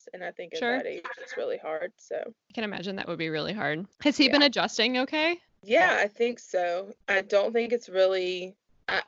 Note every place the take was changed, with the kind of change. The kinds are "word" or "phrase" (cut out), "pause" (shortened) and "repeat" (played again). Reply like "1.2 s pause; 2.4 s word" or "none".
3.9 s pause; 5.5 s pause; 7.0 s pause